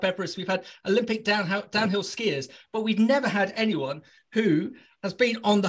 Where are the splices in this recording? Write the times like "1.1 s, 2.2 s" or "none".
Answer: none